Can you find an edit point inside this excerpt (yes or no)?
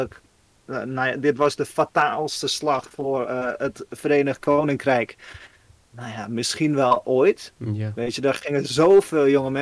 no